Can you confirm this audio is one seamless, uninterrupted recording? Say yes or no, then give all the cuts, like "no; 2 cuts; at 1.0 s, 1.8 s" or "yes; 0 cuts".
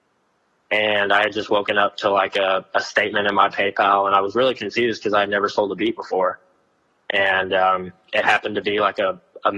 yes; 0 cuts